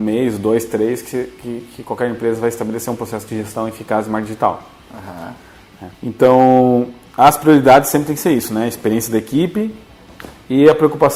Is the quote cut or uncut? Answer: cut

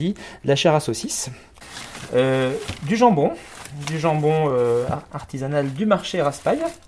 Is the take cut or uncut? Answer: uncut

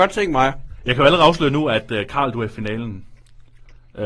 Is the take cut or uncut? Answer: uncut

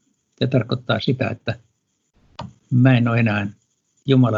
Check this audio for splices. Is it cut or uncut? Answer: uncut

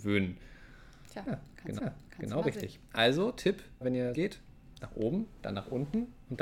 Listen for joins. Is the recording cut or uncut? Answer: cut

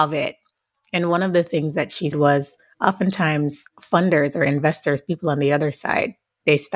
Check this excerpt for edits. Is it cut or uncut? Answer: cut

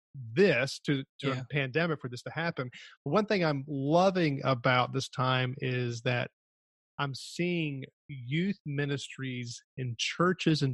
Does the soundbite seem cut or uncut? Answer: uncut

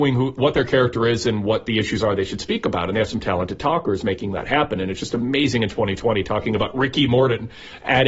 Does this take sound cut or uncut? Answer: uncut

